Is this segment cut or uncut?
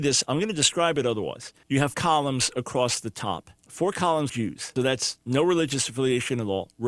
cut